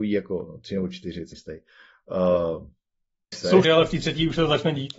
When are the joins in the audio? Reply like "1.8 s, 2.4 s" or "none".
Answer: 1.3 s, 3.3 s, 3.6 s